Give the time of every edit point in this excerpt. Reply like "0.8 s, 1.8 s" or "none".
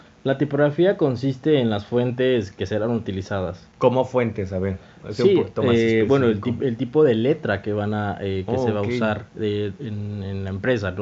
3.7 s